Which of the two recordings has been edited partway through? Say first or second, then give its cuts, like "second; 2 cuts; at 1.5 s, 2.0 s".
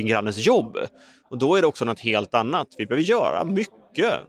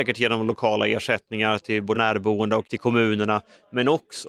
second; 2 cuts; at 1.9 s, 2.6 s